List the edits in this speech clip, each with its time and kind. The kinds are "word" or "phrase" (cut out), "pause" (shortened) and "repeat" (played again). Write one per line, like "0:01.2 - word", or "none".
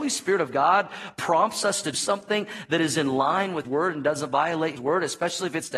0:01.9 - word
0:03.6 - word
0:04.8 - word